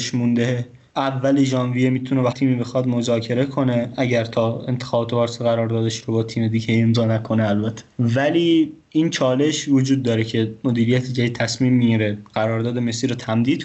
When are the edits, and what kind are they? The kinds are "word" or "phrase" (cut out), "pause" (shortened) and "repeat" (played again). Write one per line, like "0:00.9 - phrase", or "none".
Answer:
0:02.3 - word